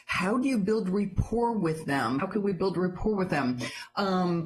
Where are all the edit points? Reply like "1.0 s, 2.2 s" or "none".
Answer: 2.2 s